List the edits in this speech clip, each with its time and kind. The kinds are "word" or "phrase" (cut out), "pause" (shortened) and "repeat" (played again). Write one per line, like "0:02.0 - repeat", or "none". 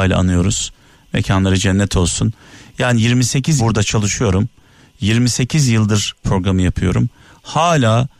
0:03.6 - word
0:06.2 - word